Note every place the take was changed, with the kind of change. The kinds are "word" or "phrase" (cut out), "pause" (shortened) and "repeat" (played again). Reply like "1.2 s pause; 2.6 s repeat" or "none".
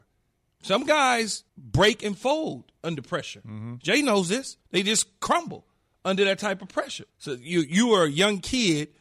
1.5 s pause; 4.6 s pause; 7.1 s pause